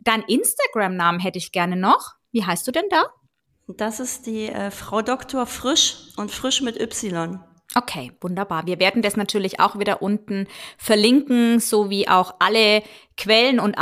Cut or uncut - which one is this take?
uncut